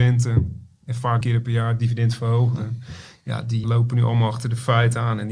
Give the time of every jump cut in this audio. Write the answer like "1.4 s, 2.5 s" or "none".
1.2 s, 3.6 s